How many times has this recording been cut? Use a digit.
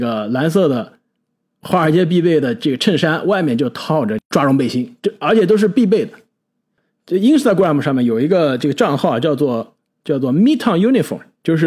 0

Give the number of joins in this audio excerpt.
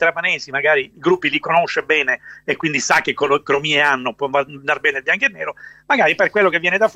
1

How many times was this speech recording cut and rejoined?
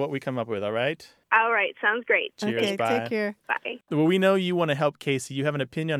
1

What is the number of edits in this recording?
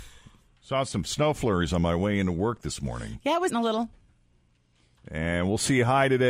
1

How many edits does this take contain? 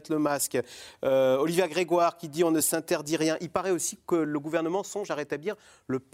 0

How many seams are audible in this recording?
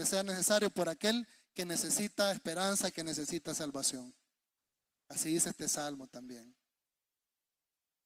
0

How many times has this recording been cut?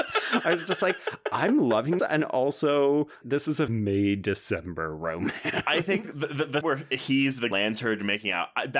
6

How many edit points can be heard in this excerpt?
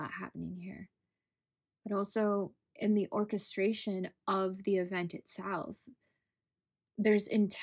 0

